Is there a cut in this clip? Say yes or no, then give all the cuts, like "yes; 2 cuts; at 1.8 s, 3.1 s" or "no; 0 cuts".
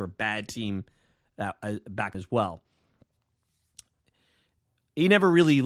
yes; 1 cut; at 2.1 s